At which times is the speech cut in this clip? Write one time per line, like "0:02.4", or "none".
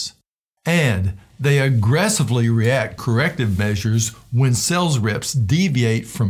0:03.0